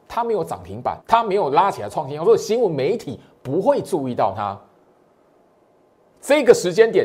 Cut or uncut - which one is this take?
cut